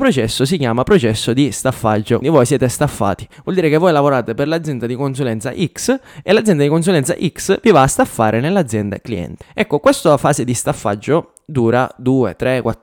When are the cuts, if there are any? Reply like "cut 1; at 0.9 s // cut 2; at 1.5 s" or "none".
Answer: cut 1; at 2.2 s